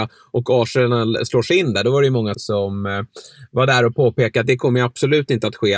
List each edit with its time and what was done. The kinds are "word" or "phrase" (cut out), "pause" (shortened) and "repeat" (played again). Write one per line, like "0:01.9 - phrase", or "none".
0:02.3 - word